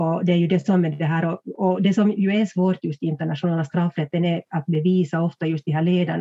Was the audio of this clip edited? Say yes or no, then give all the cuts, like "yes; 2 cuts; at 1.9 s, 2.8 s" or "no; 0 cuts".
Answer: no; 0 cuts